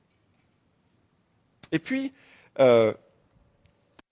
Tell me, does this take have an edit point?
no; 0 cuts

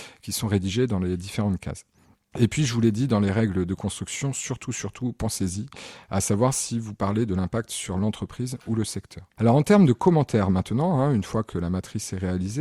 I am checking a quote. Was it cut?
no; 0 cuts

